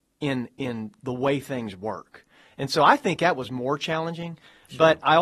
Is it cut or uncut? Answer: uncut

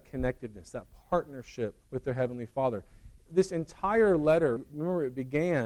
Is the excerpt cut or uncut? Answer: cut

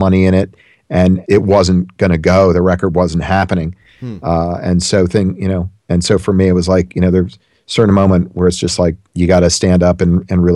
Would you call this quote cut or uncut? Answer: uncut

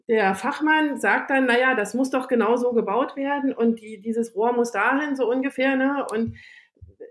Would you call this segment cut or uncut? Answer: uncut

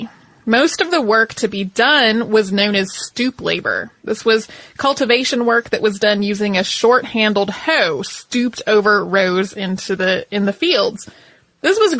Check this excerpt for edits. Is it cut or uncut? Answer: uncut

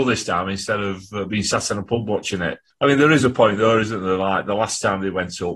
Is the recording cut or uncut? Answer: uncut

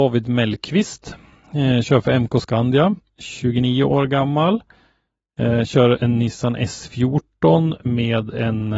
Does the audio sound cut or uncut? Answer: uncut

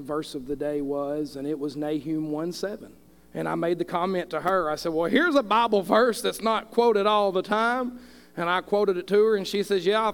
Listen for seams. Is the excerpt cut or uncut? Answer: uncut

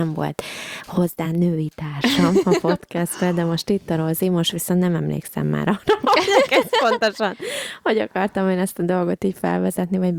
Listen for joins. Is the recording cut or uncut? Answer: uncut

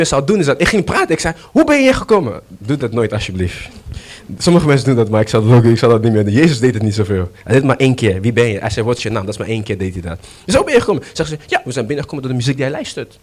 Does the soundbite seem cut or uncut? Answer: uncut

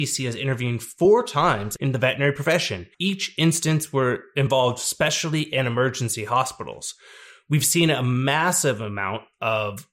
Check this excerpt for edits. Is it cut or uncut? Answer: cut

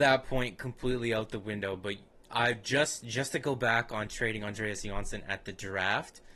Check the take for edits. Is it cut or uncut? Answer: uncut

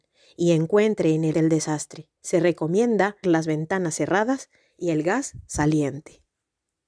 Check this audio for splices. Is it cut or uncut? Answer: cut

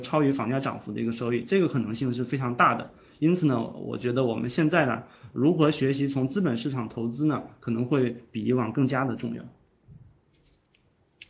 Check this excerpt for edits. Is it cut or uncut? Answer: uncut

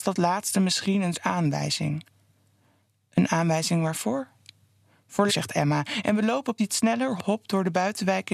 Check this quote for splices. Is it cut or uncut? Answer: cut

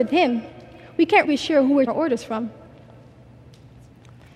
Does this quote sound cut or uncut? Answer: cut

